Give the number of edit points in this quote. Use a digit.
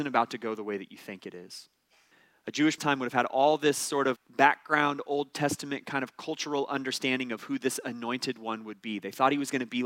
3